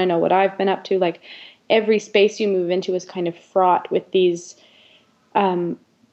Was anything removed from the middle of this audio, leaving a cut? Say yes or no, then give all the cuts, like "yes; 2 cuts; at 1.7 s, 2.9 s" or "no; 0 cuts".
no; 0 cuts